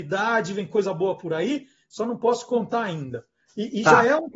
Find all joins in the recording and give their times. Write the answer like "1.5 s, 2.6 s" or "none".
none